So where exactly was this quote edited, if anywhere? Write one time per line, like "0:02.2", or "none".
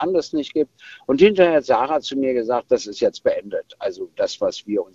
none